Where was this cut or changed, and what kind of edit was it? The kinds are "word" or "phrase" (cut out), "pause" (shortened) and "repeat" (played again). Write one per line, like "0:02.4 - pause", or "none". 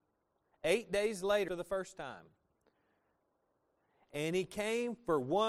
0:01.5 - word